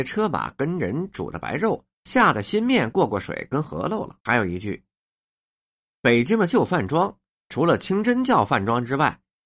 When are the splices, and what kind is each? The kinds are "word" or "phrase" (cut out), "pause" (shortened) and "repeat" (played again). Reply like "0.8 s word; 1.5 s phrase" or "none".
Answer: 1.9 s pause; 4.2 s pause